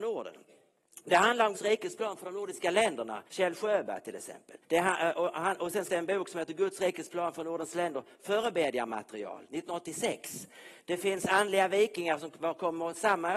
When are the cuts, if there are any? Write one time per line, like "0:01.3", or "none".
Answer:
0:01.5
0:03.3
0:04.6
0:05.9